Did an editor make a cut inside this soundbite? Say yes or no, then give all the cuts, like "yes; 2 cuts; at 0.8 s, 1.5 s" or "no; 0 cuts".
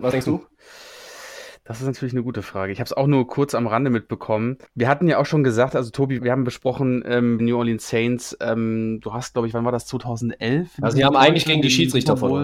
yes; 3 cuts; at 4.7 s, 6.2 s, 7.4 s